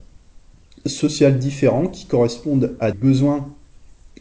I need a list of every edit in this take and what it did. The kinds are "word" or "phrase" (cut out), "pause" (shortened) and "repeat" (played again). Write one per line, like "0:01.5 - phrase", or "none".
0:02.9 - word